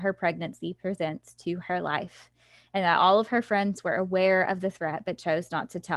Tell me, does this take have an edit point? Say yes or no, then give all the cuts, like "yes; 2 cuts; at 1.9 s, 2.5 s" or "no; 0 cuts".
no; 0 cuts